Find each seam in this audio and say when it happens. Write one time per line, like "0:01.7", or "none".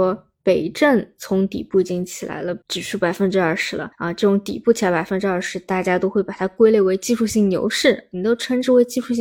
0:02.6
0:03.9